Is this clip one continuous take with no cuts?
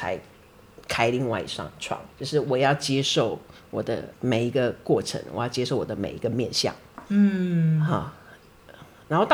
no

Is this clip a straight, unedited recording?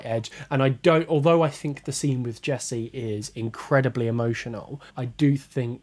no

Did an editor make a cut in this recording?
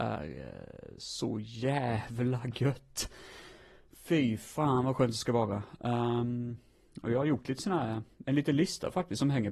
no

